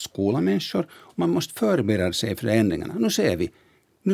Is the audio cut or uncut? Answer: uncut